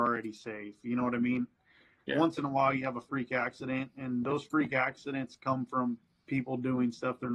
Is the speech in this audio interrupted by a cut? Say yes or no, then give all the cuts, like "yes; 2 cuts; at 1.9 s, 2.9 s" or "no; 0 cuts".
no; 0 cuts